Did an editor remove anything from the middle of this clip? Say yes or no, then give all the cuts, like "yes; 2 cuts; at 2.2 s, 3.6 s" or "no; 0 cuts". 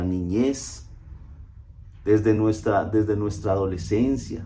no; 0 cuts